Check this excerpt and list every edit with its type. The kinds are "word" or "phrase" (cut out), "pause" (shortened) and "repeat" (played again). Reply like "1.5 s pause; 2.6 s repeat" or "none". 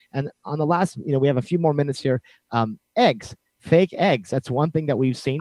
none